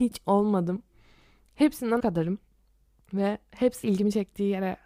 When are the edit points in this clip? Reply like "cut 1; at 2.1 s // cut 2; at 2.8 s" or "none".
cut 1; at 2.0 s // cut 2; at 3.8 s